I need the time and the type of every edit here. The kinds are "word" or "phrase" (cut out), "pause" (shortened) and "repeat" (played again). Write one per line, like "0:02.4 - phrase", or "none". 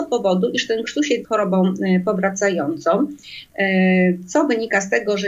0:01.2 - word